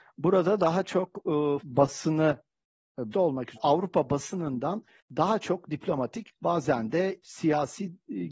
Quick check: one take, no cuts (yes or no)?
no